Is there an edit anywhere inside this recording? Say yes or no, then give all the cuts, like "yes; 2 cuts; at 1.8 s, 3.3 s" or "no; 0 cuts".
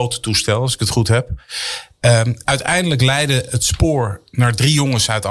no; 0 cuts